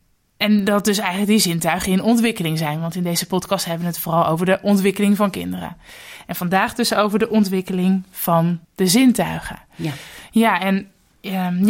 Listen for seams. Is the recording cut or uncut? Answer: cut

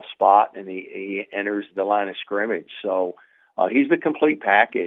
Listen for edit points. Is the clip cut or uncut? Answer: uncut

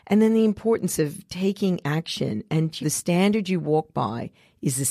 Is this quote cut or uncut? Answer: cut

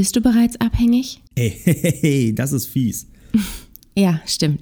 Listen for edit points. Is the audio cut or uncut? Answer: cut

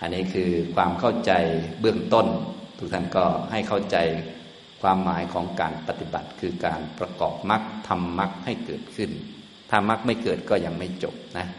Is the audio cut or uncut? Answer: uncut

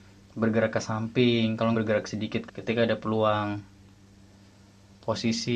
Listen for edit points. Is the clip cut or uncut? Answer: cut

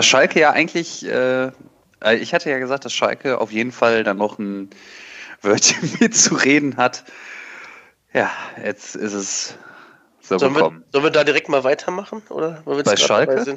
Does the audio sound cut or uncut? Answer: uncut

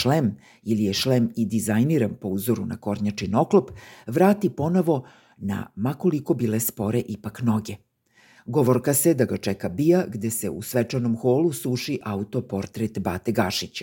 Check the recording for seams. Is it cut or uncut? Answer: uncut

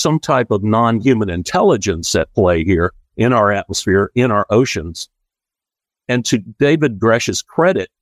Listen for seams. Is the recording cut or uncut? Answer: uncut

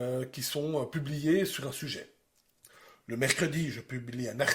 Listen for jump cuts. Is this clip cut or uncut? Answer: uncut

